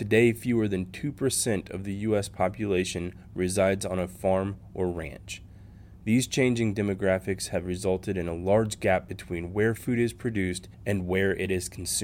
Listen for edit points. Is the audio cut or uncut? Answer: uncut